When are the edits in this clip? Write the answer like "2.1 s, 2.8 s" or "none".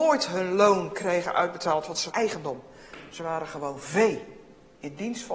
2.1 s